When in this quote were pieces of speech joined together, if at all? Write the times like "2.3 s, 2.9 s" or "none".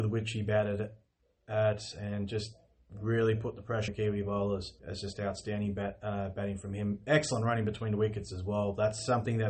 3.9 s, 4.8 s